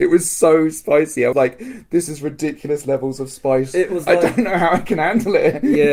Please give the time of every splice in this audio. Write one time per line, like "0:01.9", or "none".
0:01.3